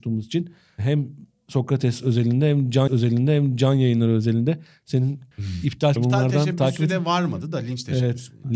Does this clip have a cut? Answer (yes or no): yes